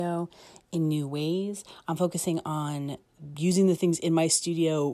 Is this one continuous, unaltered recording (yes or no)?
yes